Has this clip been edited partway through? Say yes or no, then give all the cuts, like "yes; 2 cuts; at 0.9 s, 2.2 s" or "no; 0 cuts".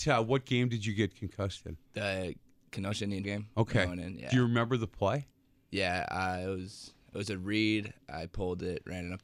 yes; 2 cuts; at 1.8 s, 3.2 s